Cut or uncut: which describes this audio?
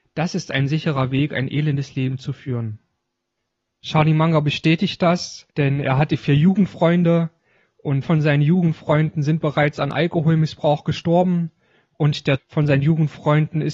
cut